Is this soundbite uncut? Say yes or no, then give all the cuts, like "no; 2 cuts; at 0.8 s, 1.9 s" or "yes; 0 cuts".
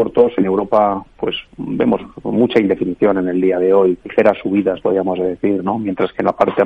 no; 2 cuts; at 1.5 s, 4.0 s